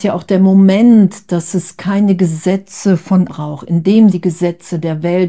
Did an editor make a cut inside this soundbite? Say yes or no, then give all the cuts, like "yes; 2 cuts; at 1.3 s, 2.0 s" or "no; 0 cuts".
yes; 2 cuts; at 3.3 s, 4.1 s